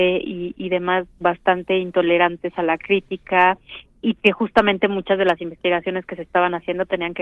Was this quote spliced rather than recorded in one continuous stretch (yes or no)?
yes